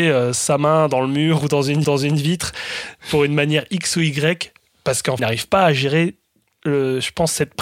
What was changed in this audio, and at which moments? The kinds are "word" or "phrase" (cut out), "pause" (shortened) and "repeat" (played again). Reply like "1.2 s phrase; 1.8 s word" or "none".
1.8 s repeat; 5.2 s phrase